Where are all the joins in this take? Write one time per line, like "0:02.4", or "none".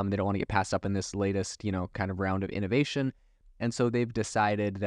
none